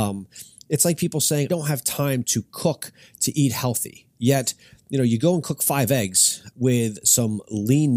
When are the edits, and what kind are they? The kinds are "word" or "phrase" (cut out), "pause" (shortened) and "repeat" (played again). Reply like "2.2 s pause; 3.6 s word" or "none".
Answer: 1.5 s word; 6.5 s word